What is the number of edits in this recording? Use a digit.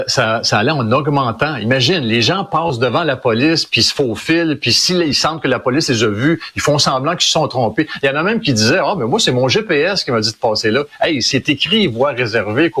0